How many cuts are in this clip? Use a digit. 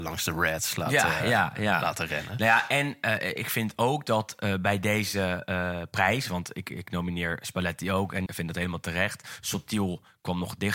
1